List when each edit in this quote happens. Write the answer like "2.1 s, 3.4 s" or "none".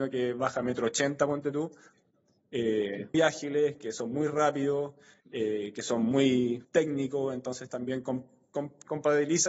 3.1 s, 6.6 s